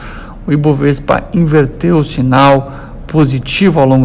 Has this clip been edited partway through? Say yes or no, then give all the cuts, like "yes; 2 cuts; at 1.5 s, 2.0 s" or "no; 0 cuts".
no; 0 cuts